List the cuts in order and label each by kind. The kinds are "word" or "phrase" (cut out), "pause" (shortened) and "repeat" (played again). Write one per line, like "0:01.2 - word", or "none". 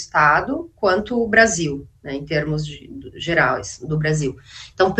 none